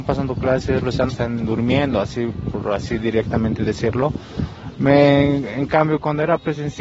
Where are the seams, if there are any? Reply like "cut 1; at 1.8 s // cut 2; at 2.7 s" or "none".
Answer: cut 1; at 1.1 s